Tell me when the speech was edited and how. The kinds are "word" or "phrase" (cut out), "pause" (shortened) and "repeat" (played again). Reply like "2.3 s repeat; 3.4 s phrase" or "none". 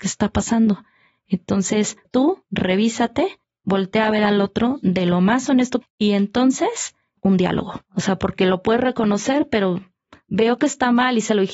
2.0 s phrase; 3.4 s pause; 5.8 s word; 7.2 s word; 7.8 s pause